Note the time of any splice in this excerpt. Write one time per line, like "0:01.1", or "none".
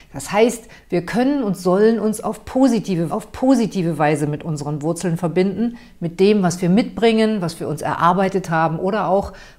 0:03.1